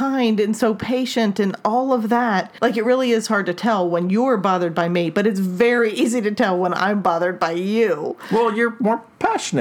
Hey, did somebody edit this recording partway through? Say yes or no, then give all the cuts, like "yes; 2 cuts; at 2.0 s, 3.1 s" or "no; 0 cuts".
no; 0 cuts